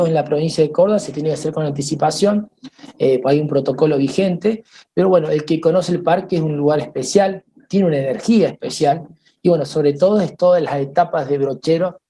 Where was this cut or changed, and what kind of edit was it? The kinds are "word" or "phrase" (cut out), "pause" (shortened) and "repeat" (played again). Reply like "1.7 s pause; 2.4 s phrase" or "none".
none